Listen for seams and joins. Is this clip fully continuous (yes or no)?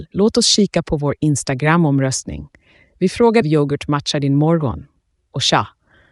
no